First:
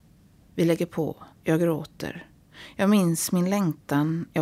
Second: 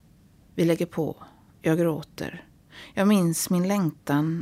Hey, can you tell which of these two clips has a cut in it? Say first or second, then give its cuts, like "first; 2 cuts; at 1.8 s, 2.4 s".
first; 1 cut; at 1.3 s